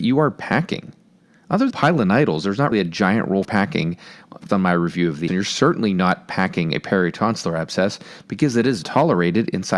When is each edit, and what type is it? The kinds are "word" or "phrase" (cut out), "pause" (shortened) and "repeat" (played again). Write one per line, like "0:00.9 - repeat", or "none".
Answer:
0:01.7 - word
0:02.7 - word
0:03.4 - word
0:04.5 - word
0:05.3 - word
0:08.8 - word

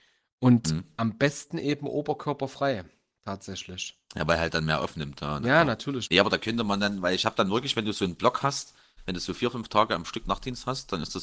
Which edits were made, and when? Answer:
none

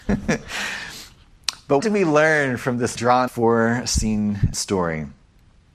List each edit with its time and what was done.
0:01.8 - word
0:03.0 - word
0:03.3 - word
0:04.5 - word

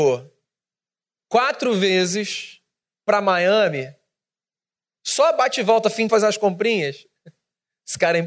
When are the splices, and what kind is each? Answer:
0:06.1 - phrase

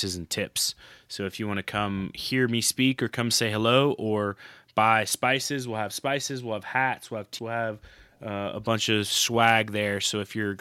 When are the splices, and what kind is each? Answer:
0:07.4 - word

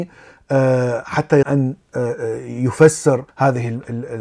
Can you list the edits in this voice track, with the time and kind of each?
0:01.4 - word
0:03.3 - pause

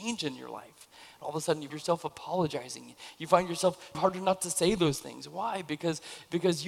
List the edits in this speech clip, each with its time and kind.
0:01.7 - word
0:03.9 - word

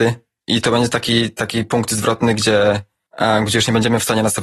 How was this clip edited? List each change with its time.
none

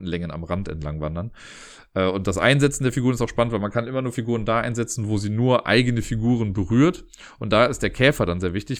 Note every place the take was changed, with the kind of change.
none

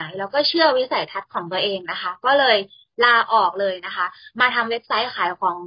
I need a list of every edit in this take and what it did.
none

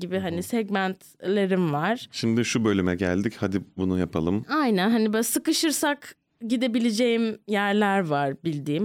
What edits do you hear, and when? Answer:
none

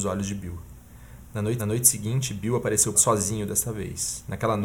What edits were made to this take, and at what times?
0:01.6 - repeat
0:02.9 - phrase

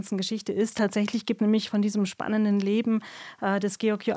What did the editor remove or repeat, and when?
0:01.4 - word

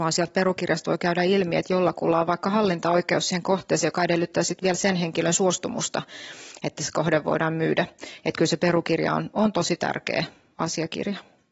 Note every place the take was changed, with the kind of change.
none

